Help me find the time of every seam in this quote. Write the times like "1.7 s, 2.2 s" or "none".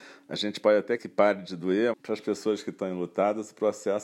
1.0 s, 1.9 s